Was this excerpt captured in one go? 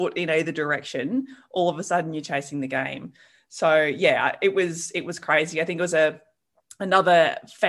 yes; 0 cuts

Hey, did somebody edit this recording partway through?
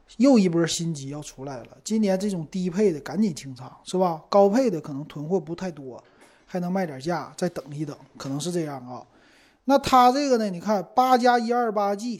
no; 0 cuts

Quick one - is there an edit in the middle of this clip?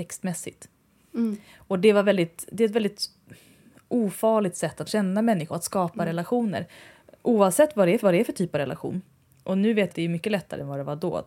yes; 4 cuts; at 4.9 s, 5.5 s, 8.0 s, 9.9 s

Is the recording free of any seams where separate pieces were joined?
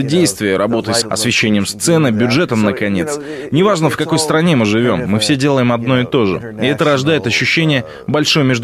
no; 1 cut; at 1.0 s

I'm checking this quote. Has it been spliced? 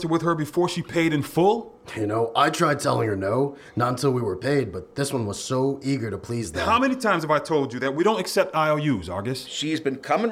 no; 0 cuts

